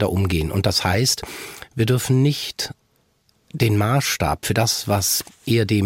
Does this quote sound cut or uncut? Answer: uncut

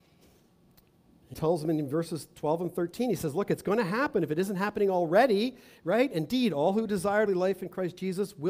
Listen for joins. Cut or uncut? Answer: cut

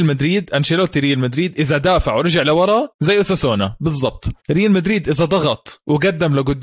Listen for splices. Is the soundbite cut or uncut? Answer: cut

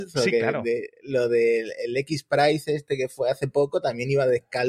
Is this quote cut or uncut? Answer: uncut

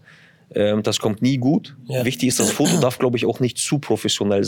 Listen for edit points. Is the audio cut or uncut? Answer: uncut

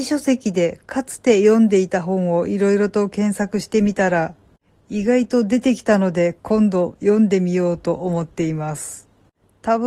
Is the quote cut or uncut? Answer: uncut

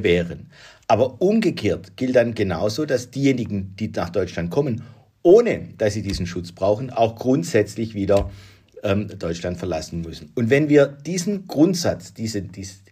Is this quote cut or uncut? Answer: uncut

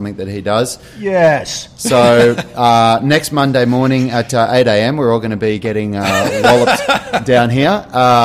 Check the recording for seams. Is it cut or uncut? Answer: uncut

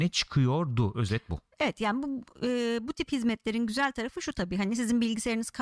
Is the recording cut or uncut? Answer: uncut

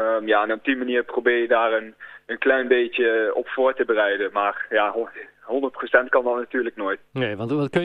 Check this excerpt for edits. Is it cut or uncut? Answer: uncut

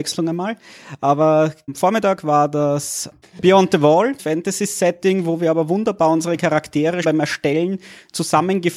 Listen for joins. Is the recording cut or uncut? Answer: cut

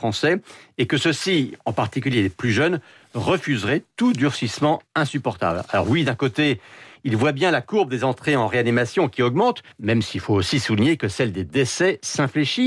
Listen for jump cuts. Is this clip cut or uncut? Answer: cut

